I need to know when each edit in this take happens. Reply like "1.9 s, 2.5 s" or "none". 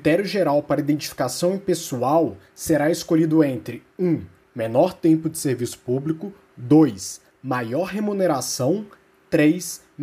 none